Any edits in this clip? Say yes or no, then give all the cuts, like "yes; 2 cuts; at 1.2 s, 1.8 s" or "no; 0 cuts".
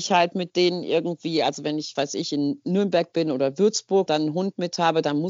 yes; 2 cuts; at 2.0 s, 4.1 s